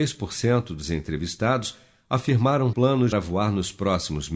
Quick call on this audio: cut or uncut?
cut